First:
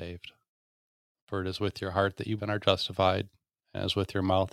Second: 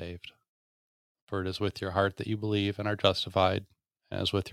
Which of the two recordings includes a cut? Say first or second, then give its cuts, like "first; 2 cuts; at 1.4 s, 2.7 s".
first; 1 cut; at 2.4 s